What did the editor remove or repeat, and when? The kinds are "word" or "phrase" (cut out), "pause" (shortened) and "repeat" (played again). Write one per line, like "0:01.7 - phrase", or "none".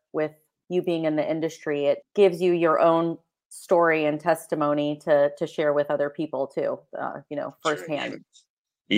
0:02.0 - word